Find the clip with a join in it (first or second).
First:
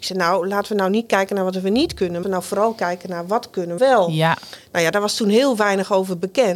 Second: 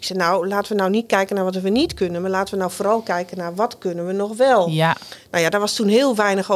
first